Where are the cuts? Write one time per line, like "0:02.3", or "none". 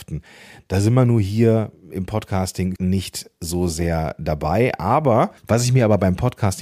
0:02.8
0:05.4